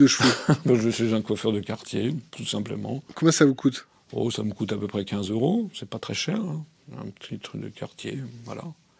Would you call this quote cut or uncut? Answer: uncut